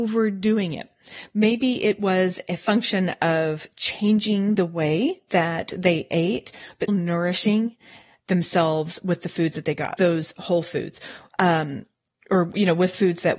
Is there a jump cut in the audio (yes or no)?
yes